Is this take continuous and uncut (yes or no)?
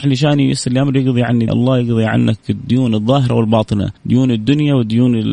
no